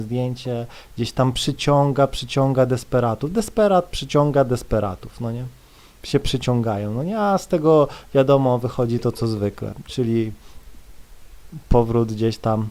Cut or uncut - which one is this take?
uncut